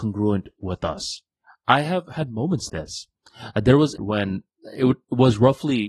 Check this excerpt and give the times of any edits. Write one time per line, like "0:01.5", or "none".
0:01.4
0:02.7
0:04.0